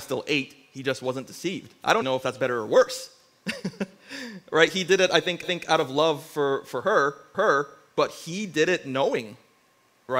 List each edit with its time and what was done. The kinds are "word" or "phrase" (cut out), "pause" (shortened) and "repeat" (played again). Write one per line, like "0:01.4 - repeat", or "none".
0:02.0 - word
0:05.4 - repeat
0:06.7 - word
0:07.3 - repeat